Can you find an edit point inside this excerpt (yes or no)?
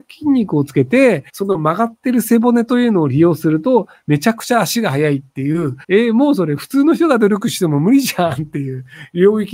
yes